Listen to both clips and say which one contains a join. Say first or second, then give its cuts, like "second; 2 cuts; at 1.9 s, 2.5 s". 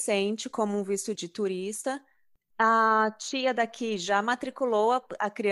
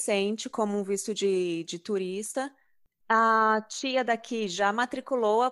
first; 1 cut; at 1.1 s